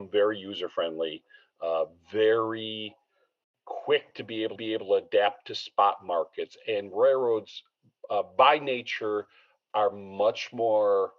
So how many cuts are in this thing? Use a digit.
1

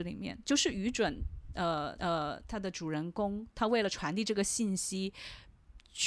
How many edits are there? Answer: 1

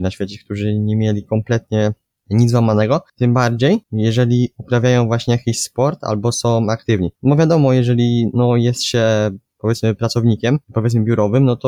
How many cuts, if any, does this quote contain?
4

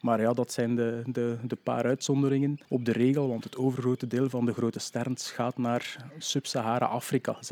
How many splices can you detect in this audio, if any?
1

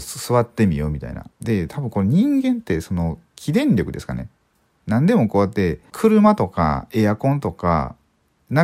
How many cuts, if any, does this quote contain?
2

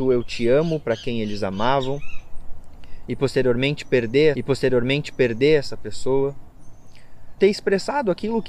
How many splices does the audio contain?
2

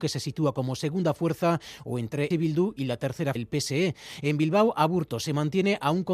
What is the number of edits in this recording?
2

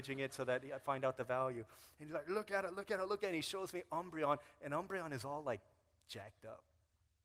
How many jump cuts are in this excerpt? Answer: 0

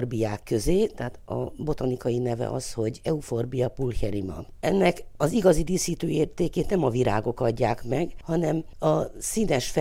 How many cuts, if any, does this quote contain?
0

